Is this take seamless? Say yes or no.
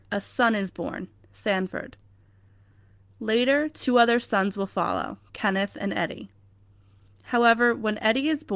yes